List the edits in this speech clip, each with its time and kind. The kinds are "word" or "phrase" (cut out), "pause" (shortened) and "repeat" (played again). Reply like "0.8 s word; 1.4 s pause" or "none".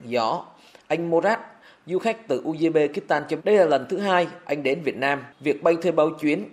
3.4 s word